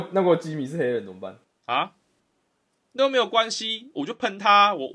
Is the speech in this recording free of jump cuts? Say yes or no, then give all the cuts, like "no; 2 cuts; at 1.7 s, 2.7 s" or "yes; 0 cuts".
no; 1 cut; at 1.4 s